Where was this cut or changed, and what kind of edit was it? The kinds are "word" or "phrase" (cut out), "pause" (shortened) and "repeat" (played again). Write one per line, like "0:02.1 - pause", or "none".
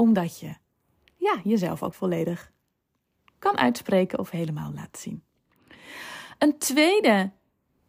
0:01.9 - word